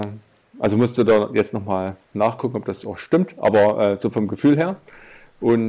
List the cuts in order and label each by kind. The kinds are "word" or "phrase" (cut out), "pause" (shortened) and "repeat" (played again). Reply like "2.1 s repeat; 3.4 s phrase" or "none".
2.0 s pause